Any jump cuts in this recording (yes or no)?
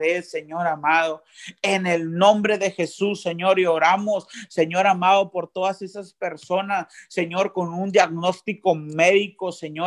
no